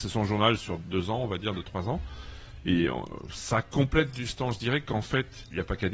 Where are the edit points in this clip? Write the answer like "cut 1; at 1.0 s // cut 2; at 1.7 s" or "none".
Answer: none